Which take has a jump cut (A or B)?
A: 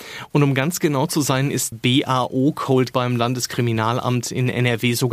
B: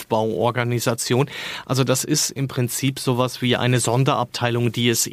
A